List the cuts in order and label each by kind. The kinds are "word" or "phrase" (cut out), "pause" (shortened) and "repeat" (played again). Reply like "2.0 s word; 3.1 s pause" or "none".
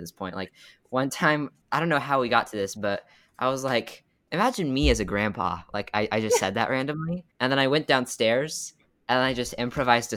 7.3 s pause